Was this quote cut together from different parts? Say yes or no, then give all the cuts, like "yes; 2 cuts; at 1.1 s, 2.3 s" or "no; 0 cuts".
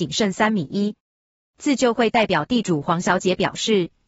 no; 0 cuts